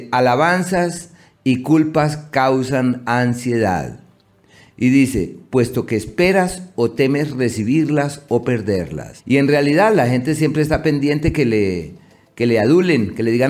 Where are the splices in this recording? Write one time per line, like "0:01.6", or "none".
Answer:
none